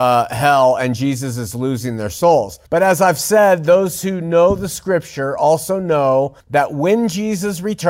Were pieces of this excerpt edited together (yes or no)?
yes